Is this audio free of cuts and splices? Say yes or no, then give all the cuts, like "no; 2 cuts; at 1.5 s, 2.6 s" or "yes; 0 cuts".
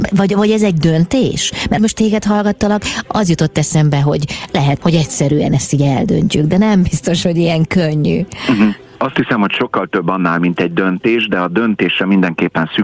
no; 2 cuts; at 1.8 s, 4.8 s